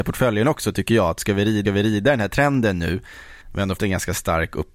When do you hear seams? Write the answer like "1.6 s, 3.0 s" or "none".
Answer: 1.6 s, 3.4 s, 3.8 s